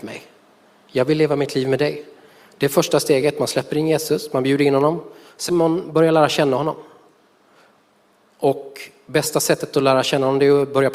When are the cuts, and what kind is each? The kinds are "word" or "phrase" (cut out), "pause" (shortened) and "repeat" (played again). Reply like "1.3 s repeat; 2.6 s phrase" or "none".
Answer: 5.5 s word